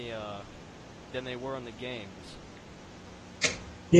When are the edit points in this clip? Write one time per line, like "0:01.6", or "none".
0:01.1